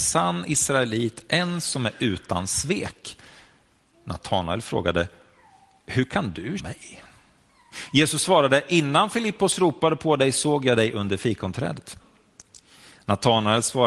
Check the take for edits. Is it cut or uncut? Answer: cut